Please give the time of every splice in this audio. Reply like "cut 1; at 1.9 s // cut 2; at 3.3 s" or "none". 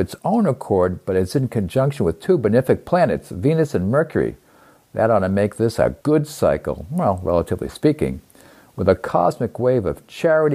cut 1; at 6.0 s